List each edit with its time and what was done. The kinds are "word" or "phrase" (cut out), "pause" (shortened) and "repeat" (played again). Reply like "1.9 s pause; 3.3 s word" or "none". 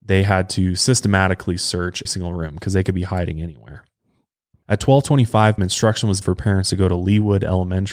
2.1 s word; 5.6 s word; 6.2 s word